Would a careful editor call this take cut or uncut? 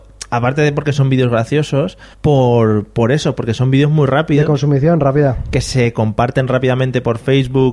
cut